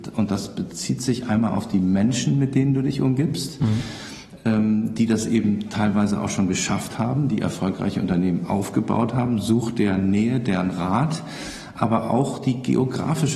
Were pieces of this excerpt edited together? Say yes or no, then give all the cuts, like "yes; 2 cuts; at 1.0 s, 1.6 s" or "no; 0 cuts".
no; 0 cuts